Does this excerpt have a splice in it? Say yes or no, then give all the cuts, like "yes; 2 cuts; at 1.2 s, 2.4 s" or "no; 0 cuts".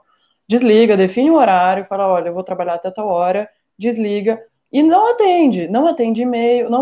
no; 0 cuts